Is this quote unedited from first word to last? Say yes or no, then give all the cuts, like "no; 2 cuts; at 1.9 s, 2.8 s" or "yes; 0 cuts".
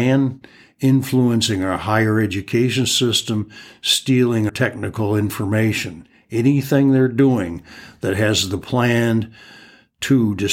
no; 1 cut; at 4.5 s